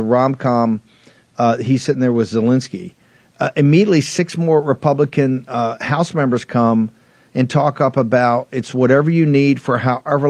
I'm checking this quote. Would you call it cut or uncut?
uncut